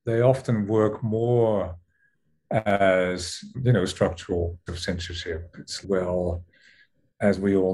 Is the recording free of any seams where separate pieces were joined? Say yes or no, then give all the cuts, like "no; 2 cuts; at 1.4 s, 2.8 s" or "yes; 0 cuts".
no; 3 cuts; at 3.5 s, 4.7 s, 5.8 s